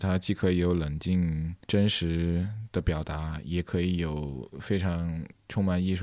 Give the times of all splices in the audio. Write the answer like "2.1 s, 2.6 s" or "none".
1.6 s